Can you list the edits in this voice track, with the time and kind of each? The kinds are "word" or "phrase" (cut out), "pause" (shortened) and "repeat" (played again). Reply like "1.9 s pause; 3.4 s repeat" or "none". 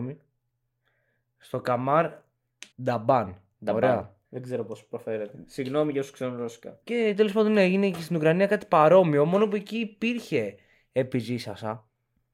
2.7 s pause; 4.2 s pause; 6.8 s pause